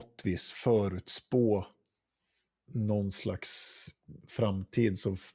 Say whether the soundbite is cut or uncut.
uncut